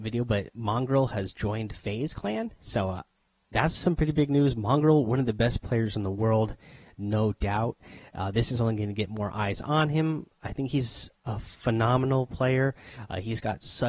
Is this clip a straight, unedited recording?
yes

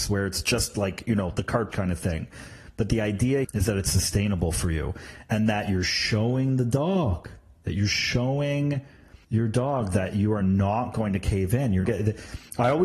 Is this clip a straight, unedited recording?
no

